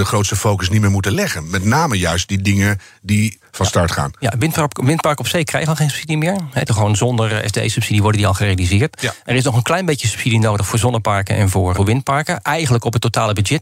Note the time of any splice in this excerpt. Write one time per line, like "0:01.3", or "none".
0:03.4
0:06.7
0:11.7